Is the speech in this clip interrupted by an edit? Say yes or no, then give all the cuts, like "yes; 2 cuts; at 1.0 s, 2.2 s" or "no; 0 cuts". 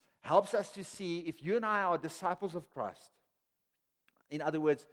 no; 0 cuts